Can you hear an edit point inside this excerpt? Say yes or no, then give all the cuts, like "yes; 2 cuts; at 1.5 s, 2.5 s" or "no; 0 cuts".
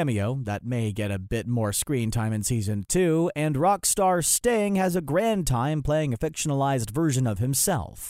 no; 0 cuts